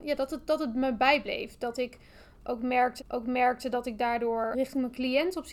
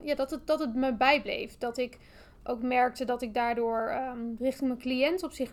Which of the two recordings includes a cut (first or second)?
first